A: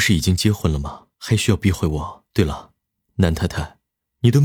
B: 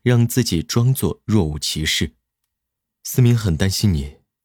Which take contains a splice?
A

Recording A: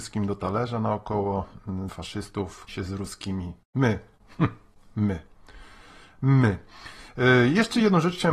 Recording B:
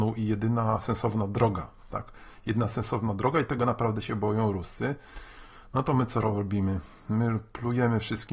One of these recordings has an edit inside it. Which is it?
A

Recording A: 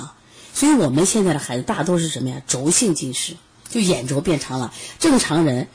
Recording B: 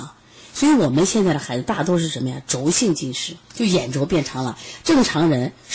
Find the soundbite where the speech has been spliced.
B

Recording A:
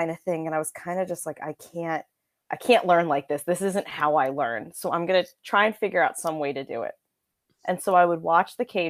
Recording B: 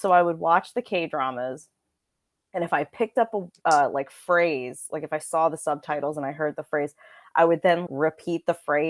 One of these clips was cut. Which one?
B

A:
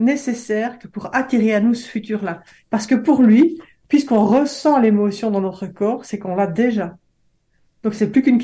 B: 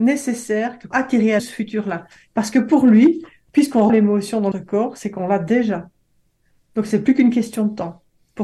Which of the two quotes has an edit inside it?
B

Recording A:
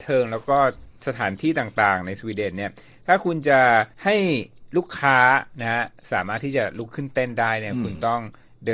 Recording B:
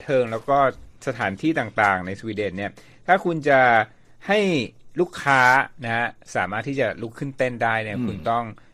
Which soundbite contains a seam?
A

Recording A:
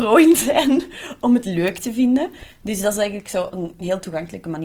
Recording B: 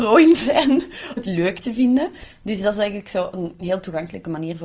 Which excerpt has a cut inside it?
B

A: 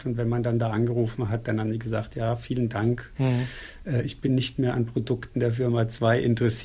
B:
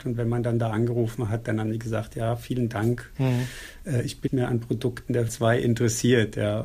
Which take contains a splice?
B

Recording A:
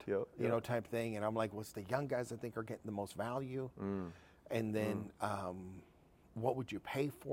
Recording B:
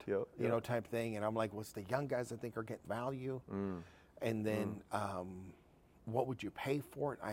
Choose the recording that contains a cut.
B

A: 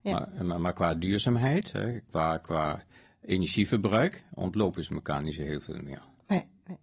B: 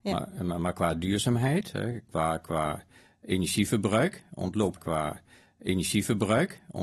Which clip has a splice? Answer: B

